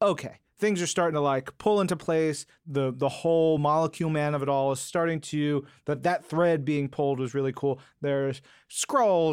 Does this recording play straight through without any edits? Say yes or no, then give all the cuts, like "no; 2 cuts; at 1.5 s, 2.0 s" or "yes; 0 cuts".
yes; 0 cuts